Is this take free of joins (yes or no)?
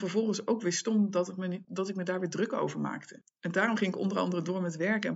no